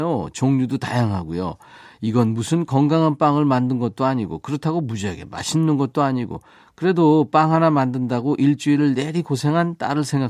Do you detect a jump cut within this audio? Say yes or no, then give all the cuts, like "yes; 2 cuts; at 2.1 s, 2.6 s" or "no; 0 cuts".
no; 0 cuts